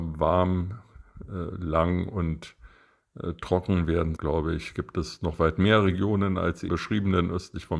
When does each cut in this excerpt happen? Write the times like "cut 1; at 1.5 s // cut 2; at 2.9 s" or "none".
cut 1; at 4.2 s // cut 2; at 6.7 s